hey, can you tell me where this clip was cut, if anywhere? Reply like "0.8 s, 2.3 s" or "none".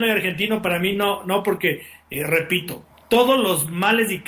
none